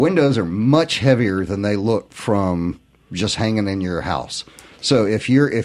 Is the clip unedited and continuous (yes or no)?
yes